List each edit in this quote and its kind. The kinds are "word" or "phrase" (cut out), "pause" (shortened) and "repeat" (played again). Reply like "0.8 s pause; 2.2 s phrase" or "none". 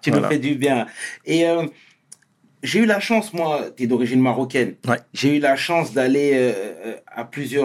none